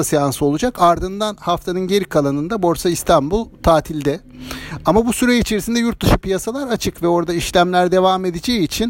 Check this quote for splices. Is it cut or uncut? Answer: uncut